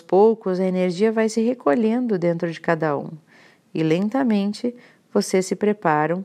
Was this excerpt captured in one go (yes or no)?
yes